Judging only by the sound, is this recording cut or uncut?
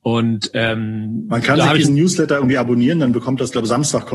uncut